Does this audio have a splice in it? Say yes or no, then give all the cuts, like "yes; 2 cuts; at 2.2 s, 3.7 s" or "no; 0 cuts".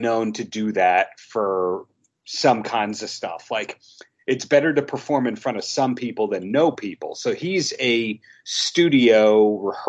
no; 0 cuts